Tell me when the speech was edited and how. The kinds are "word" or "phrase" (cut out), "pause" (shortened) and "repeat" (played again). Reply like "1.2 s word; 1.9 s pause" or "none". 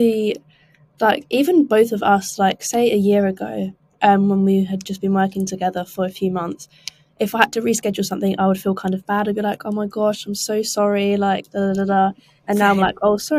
none